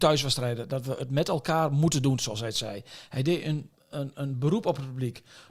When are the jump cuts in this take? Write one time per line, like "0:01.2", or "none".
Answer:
none